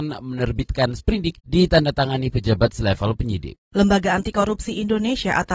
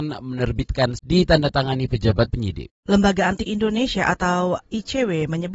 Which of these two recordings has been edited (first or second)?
second